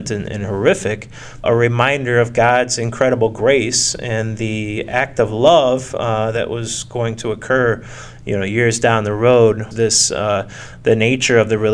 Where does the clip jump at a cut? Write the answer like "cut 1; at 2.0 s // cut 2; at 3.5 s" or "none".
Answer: cut 1; at 1.4 s // cut 2; at 9.7 s